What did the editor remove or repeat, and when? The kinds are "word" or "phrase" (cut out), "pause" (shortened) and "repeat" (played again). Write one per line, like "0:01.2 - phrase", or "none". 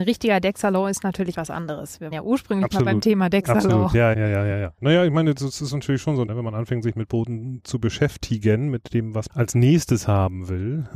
0:01.3 - word
0:02.1 - word
0:04.1 - word
0:06.3 - word
0:09.3 - word